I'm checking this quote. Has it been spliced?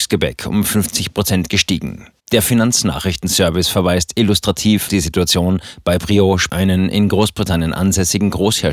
yes; 3 cuts; at 2.2 s, 4.9 s, 6.5 s

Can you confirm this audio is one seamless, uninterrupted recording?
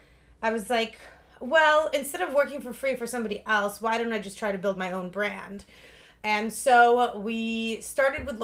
yes; 0 cuts

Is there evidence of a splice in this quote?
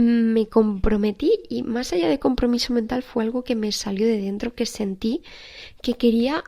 no; 0 cuts

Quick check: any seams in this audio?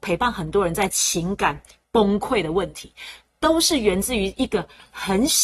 no; 0 cuts

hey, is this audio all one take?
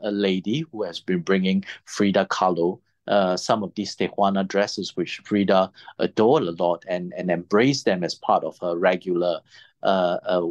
yes; 0 cuts

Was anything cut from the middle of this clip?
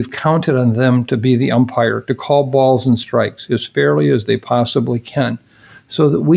no; 0 cuts

